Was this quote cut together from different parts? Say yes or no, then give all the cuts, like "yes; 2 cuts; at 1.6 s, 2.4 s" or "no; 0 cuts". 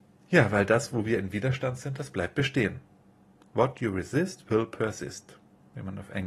no; 0 cuts